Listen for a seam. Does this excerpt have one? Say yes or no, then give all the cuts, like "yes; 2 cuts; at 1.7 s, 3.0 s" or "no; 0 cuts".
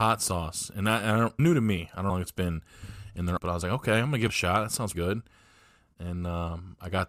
yes; 5 cuts; at 1.4 s, 2.1 s, 3.4 s, 4.3 s, 4.9 s